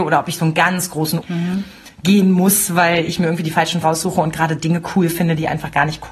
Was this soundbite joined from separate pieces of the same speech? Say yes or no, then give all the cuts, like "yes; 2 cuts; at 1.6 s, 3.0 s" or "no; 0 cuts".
yes; 2 cuts; at 1.2 s, 3.8 s